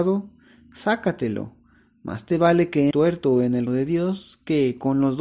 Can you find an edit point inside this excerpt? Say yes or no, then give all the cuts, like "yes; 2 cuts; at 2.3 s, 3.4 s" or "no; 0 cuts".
yes; 2 cuts; at 2.9 s, 3.7 s